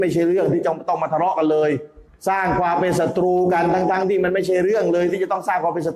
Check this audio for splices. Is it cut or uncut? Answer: cut